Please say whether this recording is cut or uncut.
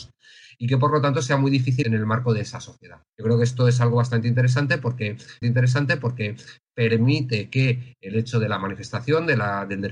cut